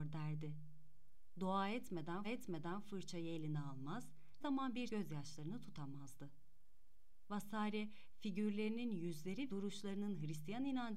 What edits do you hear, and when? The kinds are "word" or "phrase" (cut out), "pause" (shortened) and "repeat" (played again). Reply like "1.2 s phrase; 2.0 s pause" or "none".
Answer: 2.2 s repeat; 4.4 s word; 4.9 s phrase; 9.5 s word